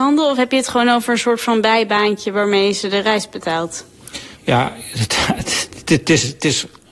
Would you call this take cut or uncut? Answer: cut